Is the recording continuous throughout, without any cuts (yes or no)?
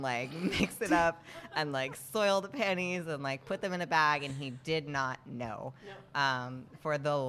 yes